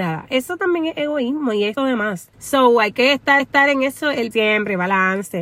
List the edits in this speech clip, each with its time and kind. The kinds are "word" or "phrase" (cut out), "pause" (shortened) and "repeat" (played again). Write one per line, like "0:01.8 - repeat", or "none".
0:01.8 - word
0:02.3 - pause
0:03.4 - repeat
0:04.3 - word